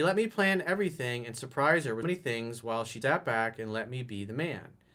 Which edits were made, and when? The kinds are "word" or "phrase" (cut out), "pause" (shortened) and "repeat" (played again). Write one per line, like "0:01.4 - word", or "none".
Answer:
0:02.0 - word
0:03.0 - word